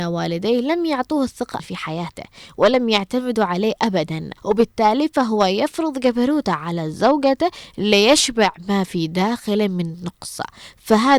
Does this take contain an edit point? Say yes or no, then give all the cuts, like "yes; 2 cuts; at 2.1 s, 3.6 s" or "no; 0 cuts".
yes; 2 cuts; at 1.6 s, 4.4 s